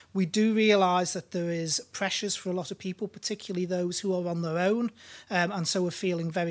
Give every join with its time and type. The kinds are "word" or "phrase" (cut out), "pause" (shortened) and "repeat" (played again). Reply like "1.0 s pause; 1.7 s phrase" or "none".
none